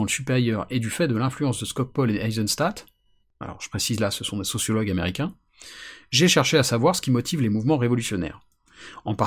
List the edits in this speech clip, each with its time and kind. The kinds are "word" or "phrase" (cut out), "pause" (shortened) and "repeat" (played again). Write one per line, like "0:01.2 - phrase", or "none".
none

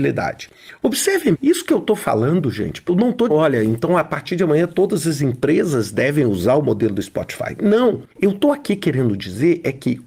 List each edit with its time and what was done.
0:01.3 - word
0:02.9 - phrase
0:03.3 - word
0:08.1 - pause

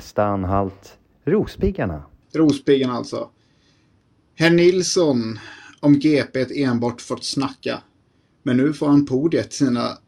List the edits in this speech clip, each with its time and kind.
none

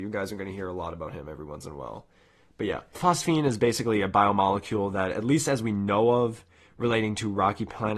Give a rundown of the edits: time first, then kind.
0:02.9 - word

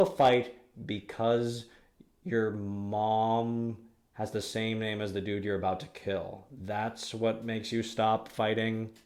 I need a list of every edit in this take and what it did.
none

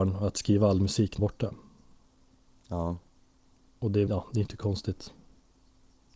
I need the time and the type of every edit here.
0:01.2 - phrase
0:04.1 - word

